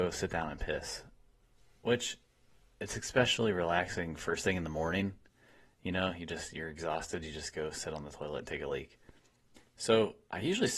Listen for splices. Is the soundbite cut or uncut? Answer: uncut